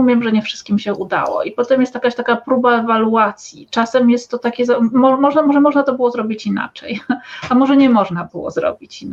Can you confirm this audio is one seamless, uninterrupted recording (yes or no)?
yes